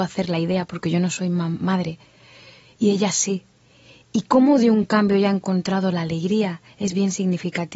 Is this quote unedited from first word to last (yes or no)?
yes